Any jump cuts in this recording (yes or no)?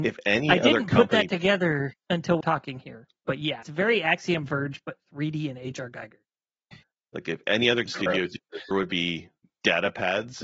yes